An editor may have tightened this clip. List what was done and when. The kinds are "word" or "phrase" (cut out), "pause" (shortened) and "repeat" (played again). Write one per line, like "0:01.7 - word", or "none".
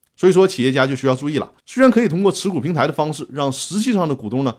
0:01.6 - pause